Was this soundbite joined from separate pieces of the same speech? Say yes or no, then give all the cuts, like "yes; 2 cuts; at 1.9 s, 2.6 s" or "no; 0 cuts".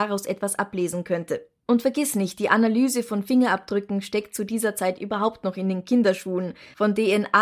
no; 0 cuts